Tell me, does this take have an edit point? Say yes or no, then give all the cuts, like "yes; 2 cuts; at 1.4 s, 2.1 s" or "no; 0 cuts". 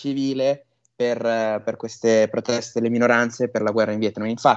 no; 0 cuts